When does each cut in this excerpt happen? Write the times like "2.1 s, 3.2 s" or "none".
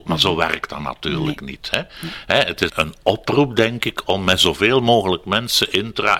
2.7 s